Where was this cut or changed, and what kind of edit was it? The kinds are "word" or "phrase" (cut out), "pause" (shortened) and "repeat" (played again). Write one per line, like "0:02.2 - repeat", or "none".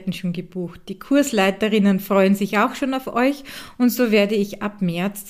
none

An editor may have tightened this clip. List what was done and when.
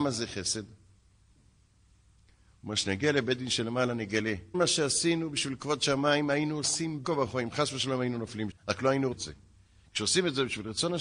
0:04.5 - word
0:07.0 - word
0:08.5 - word
0:09.1 - word

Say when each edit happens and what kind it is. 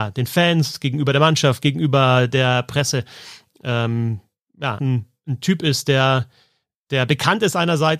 0:04.8 - word

